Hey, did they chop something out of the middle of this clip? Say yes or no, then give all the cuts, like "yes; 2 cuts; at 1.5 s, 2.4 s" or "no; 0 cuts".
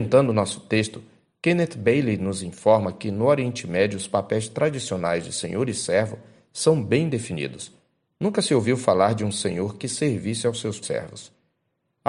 yes; 1 cut; at 10.8 s